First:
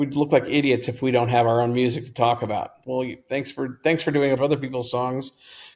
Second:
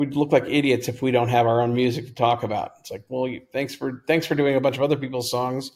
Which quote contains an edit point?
first; 2 cuts; at 2.8 s, 4.4 s

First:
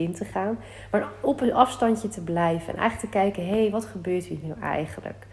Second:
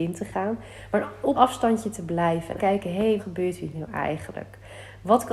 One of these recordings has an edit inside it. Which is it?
second; 3 cuts; at 1.3 s, 2.6 s, 3.2 s

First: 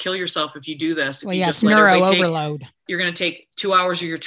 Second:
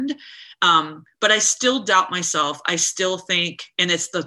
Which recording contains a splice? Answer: first; 1 cut; at 2.9 s

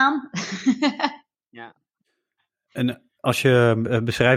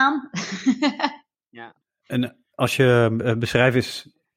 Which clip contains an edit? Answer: second; 1 cut; at 1.8 s

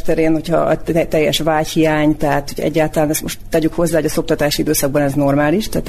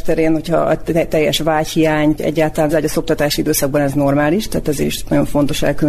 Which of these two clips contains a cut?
second; 2 cuts; at 2.2 s, 2.7 s

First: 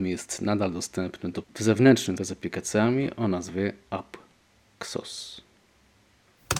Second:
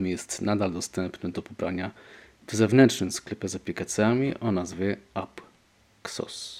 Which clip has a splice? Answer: first; 2 cuts; at 1.4 s, 2.2 s

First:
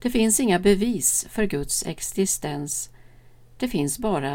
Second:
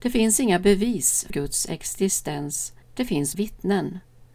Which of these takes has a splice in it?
second; 3 cuts; at 1.3 s, 2.8 s, 3.3 s

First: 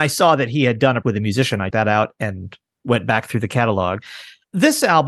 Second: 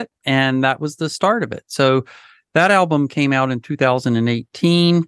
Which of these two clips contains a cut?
first; 3 cuts; at 1.0 s, 1.7 s, 2.7 s

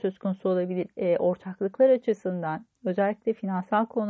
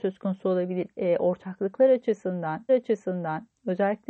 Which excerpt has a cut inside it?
second; 1 cut; at 2.7 s

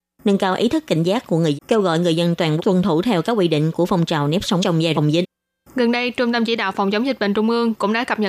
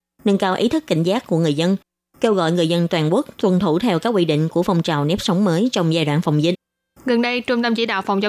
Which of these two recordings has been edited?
first; 4 cuts; at 1.5 s, 2.6 s, 4.6 s, 4.9 s

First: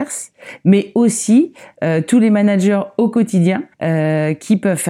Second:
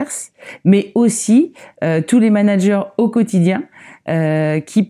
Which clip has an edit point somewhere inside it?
first; 1 cut; at 3.7 s

